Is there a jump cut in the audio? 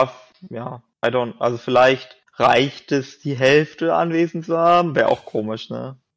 yes; 2 cuts; at 0.9 s, 2.3 s

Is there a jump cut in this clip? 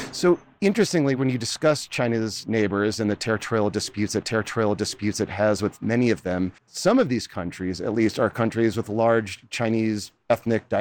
yes; 2 cuts; at 4.2 s, 6.6 s

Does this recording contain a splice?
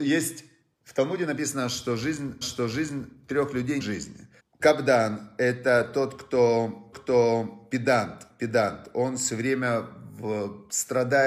yes; 4 cuts; at 2.4 s, 3.8 s, 4.4 s, 6.9 s

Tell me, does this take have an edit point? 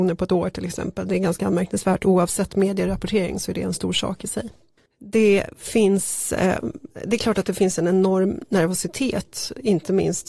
yes; 1 cut; at 4.8 s

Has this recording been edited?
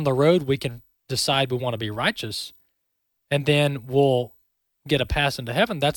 no; 0 cuts

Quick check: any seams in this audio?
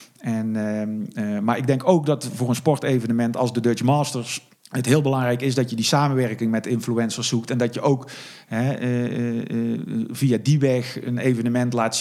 yes; 1 cut; at 4.5 s

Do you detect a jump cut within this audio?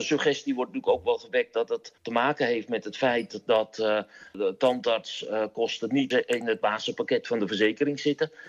yes; 1 cut; at 2.0 s

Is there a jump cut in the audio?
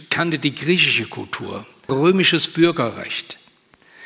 yes; 1 cut; at 1.9 s

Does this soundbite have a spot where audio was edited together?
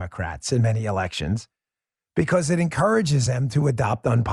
no; 0 cuts

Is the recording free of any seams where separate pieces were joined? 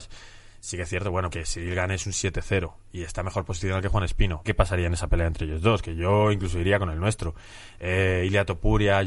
no; 2 cuts; at 1.3 s, 4.4 s

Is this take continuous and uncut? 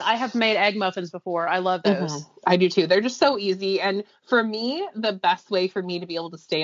yes; 0 cuts

